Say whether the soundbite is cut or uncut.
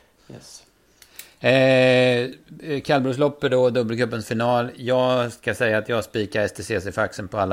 uncut